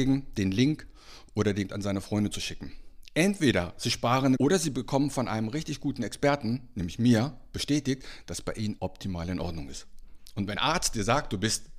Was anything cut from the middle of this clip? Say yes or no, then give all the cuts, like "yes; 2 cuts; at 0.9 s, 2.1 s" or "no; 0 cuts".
yes; 4 cuts; at 1.7 s, 4.4 s, 8.8 s, 10.5 s